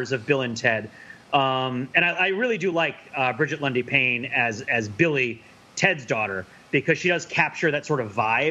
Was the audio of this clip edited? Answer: no; 0 cuts

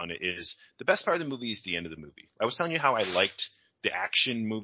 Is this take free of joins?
yes; 0 cuts

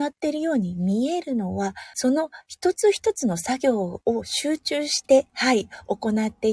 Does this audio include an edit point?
yes; 2 cuts; at 1.9 s, 5.3 s

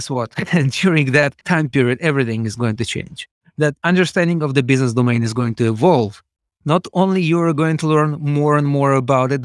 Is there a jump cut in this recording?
no; 0 cuts

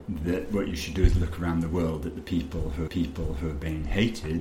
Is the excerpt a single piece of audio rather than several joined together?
no; 1 cut; at 2.9 s

